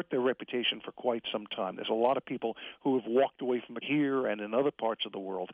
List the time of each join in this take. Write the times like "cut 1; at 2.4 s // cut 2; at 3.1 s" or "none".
cut 1; at 3.8 s